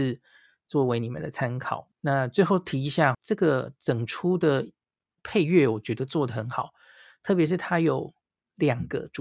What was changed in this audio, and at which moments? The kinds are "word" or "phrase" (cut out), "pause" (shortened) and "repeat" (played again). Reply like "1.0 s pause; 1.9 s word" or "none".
1.9 s pause; 3.1 s word